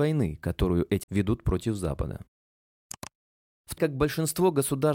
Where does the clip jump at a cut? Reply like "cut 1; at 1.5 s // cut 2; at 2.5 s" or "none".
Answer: cut 1; at 1.0 s // cut 2; at 3.8 s